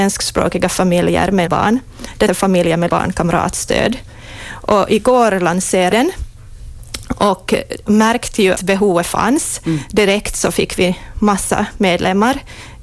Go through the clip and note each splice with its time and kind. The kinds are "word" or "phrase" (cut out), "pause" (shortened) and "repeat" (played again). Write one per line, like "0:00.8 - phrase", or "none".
0:01.5 - word
0:02.3 - word
0:02.9 - word
0:05.9 - word
0:07.9 - word
0:08.5 - word